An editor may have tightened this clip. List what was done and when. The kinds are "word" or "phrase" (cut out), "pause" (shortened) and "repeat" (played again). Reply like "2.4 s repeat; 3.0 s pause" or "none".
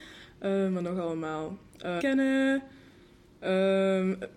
2.0 s phrase